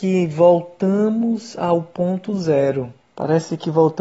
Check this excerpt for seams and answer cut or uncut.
cut